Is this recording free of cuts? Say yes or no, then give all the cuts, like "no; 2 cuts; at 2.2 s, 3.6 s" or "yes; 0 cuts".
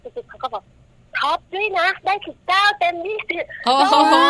yes; 0 cuts